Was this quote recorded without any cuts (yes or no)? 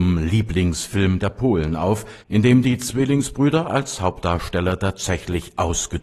no